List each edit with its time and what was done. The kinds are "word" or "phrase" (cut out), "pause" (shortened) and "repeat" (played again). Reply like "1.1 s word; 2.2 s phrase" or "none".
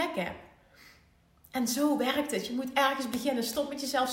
none